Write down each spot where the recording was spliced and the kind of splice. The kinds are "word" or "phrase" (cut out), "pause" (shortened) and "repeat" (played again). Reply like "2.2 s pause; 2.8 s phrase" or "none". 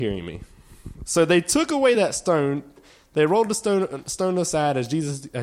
none